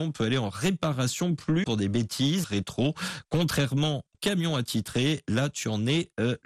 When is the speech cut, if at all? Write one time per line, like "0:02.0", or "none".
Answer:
0:01.6
0:02.4
0:04.1